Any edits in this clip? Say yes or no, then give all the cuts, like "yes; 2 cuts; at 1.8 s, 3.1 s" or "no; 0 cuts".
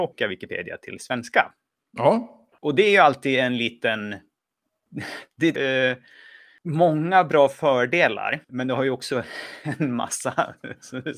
yes; 2 cuts; at 5.6 s, 8.4 s